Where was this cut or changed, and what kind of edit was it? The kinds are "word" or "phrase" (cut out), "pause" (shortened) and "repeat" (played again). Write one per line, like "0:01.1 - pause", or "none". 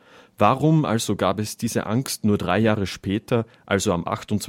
none